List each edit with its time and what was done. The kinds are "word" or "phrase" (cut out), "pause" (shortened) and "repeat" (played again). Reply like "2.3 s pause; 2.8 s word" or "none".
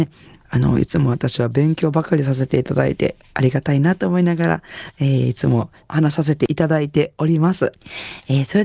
none

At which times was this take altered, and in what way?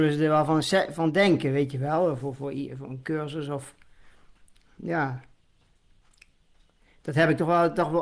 none

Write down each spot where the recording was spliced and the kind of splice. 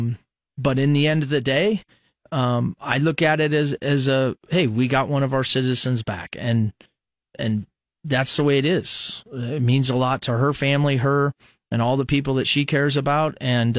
none

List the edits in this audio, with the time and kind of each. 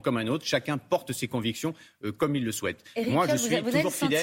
none

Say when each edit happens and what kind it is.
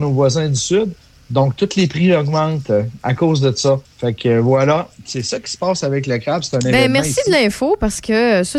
3.8 s pause

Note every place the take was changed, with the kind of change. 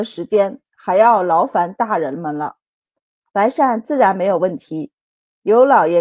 none

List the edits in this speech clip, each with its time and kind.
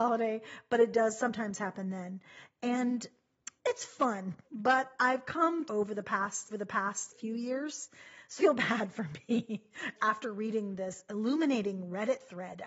3.6 s pause; 4.4 s pause; 5.7 s phrase; 6.5 s repeat; 8.4 s word; 9.9 s word

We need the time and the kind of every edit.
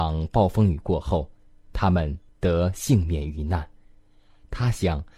2.3 s pause

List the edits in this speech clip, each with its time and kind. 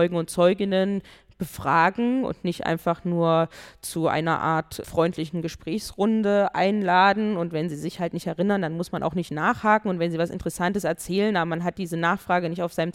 4.8 s word

